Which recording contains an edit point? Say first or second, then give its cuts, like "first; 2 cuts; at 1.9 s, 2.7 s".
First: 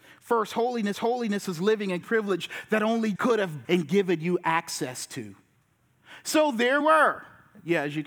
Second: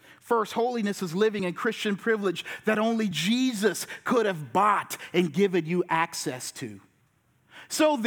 first; 5 cuts; at 0.9 s, 2.0 s, 3.2 s, 3.6 s, 6.8 s